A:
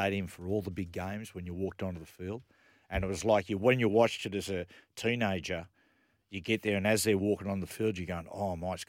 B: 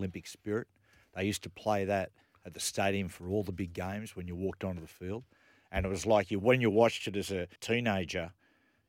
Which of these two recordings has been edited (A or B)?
B